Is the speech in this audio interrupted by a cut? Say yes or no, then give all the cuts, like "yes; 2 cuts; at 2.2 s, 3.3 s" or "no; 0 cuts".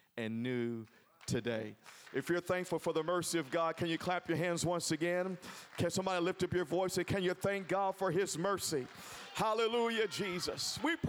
no; 0 cuts